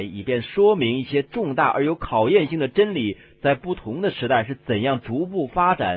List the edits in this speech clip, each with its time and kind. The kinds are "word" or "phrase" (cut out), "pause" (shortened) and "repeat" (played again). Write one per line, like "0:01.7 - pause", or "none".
none